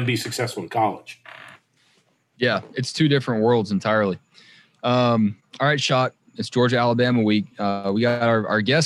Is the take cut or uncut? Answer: uncut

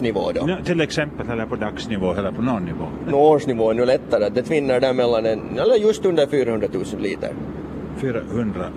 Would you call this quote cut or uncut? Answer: uncut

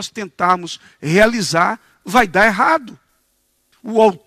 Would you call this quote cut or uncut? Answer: uncut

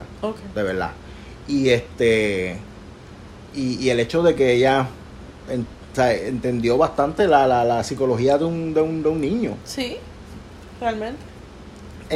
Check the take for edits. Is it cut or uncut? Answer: uncut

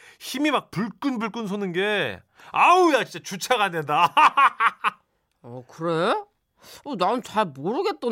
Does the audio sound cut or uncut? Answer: uncut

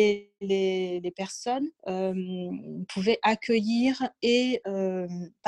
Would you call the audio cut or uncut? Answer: cut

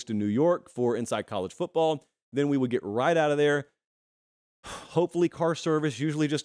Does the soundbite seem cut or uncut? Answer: uncut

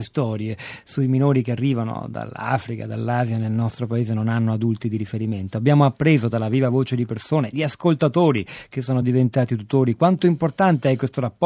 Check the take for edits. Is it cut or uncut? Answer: uncut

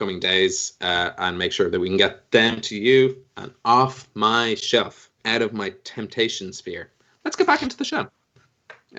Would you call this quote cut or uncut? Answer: cut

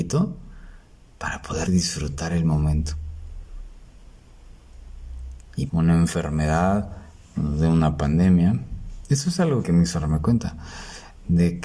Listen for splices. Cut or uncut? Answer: cut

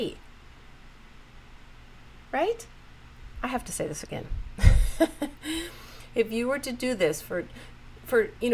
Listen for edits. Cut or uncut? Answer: uncut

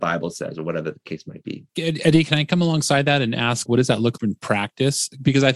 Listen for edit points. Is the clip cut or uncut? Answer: cut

